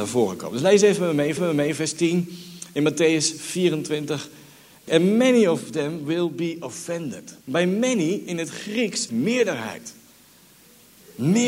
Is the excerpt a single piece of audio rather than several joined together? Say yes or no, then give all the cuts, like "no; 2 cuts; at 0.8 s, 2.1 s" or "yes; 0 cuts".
no; 4 cuts; at 1.4 s, 4.9 s, 7.4 s, 9.1 s